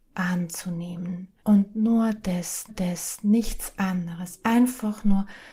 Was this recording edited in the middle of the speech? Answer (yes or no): yes